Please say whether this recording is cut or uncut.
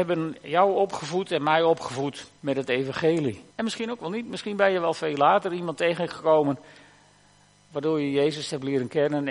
cut